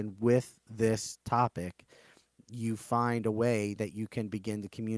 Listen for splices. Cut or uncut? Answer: uncut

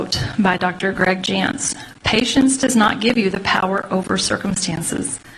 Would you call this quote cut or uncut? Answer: uncut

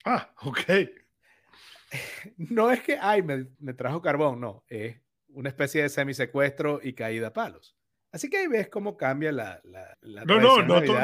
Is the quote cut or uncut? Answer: cut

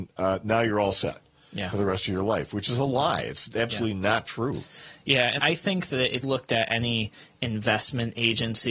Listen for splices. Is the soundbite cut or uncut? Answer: cut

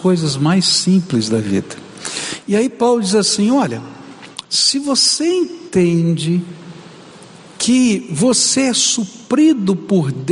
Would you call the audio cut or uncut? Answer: uncut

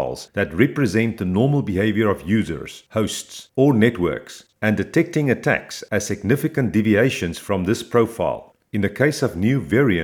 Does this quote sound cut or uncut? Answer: cut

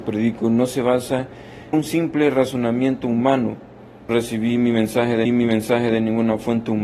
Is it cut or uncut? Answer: cut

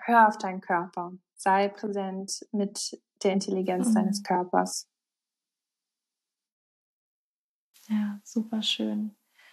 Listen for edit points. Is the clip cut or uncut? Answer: uncut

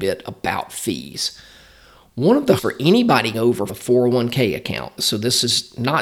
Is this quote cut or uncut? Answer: cut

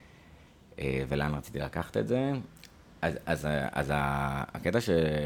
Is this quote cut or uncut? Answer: uncut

